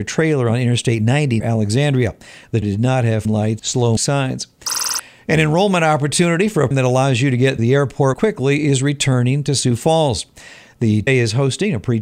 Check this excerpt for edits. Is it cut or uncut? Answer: cut